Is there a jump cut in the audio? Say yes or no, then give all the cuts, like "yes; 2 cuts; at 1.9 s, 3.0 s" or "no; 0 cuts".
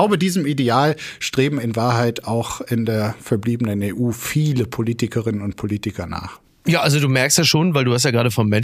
yes; 1 cut; at 6.5 s